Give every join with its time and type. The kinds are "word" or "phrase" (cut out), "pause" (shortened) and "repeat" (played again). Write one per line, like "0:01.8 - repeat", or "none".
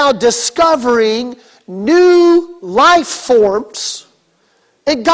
none